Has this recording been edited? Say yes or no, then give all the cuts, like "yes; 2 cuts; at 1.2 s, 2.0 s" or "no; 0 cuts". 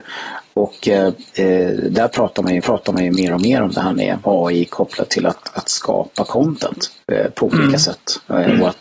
yes; 2 cuts; at 2.6 s, 4.2 s